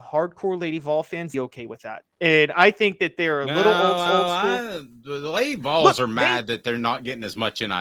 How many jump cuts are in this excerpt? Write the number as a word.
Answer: three